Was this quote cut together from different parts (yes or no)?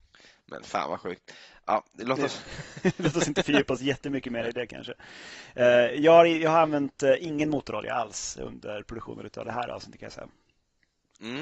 no